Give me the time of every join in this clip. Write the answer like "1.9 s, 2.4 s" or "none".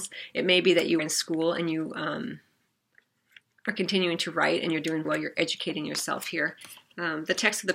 1.0 s, 5.0 s

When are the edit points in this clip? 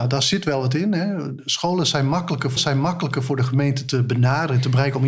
2.6 s

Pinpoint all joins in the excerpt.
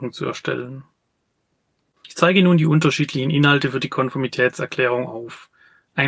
none

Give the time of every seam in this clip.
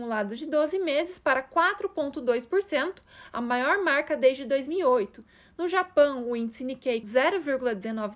7.0 s

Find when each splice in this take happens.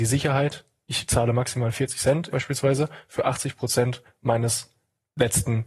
2.3 s

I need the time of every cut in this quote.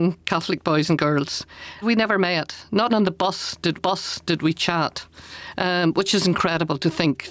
1.8 s, 2.9 s, 3.8 s

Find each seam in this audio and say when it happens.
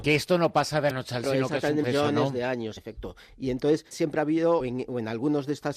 0.9 s, 1.2 s, 1.8 s, 2.8 s, 3.9 s, 4.6 s

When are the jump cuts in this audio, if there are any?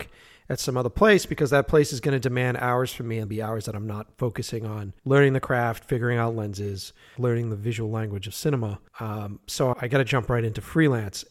3.3 s, 5.0 s, 7.2 s, 8.9 s, 9.7 s

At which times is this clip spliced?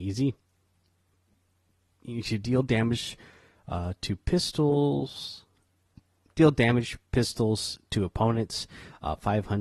none

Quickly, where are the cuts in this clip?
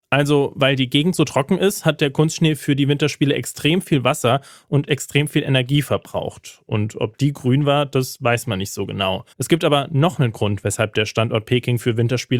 9.3 s

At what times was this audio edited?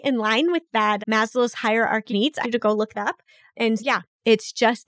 1.0 s, 2.1 s, 2.4 s, 2.9 s, 3.8 s

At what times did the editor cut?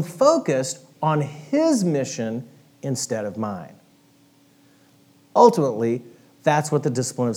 none

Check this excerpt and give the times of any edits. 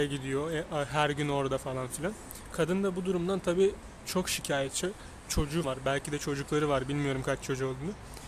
5.6 s

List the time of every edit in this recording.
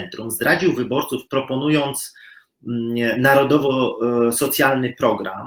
1.3 s

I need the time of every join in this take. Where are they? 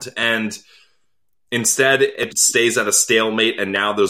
2.3 s

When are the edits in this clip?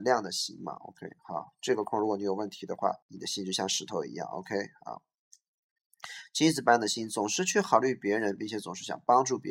3.0 s

